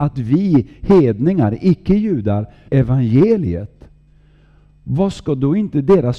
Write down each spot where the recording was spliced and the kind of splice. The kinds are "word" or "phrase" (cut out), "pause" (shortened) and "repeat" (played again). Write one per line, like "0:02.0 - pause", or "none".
0:02.7 - word

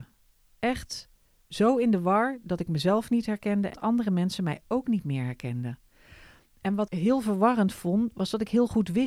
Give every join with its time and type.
0:03.7 - word
0:06.9 - word

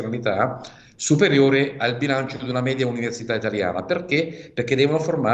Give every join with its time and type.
none

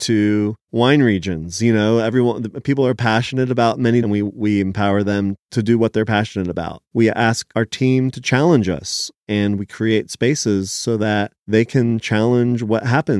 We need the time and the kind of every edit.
0:04.0 - phrase

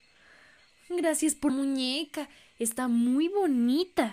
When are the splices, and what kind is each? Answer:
0:01.5 - word

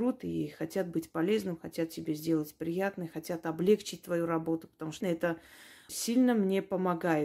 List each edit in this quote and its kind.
0:05.0 - word
0:05.9 - word

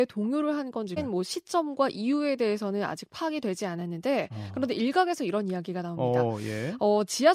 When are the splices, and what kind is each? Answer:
0:01.0 - word

